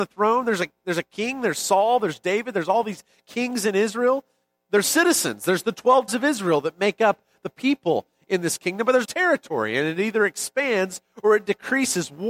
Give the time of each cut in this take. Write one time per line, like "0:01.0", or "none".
0:04.8
0:06.1
0:09.0